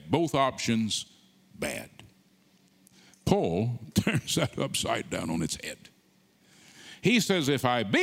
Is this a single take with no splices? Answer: yes; 0 cuts

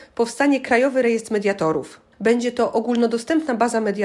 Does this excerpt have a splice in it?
yes; 1 cut; at 2.1 s

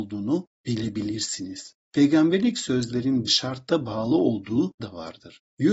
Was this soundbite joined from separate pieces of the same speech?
yes; 2 cuts; at 3.3 s, 4.8 s

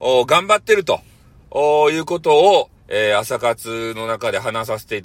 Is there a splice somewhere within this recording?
yes; 1 cut; at 2.8 s

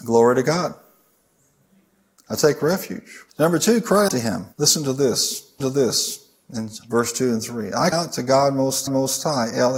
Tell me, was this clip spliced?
yes; 6 cuts; at 3.3 s, 4.1 s, 4.5 s, 5.6 s, 7.9 s, 8.9 s

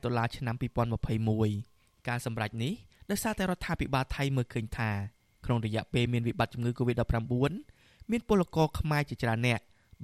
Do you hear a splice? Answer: no; 0 cuts

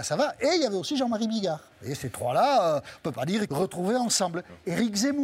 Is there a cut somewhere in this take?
yes; 2 cuts; at 1.7 s, 3.5 s

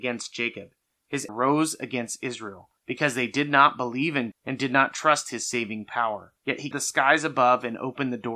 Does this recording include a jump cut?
yes; 5 cuts; at 1.3 s, 2.8 s, 4.3 s, 6.4 s, 6.7 s

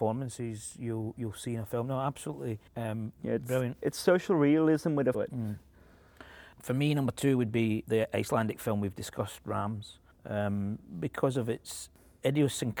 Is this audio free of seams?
no; 4 cuts; at 2.7 s, 5.1 s, 7.8 s, 10.1 s

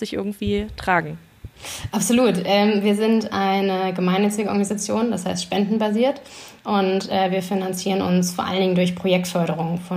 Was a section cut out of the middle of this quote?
no; 0 cuts

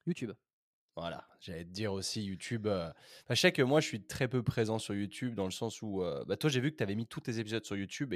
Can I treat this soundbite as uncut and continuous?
yes; 0 cuts

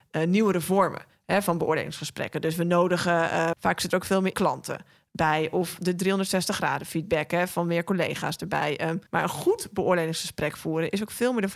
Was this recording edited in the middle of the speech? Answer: yes; 3 cuts; at 3.5 s, 4.3 s, 9.1 s

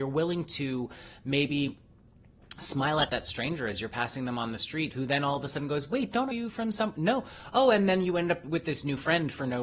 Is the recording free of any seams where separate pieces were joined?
no; 1 cut; at 6.3 s

